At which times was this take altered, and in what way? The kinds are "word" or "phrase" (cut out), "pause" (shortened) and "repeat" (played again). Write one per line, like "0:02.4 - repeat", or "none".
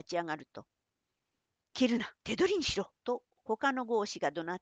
0:02.2 - pause
0:03.0 - pause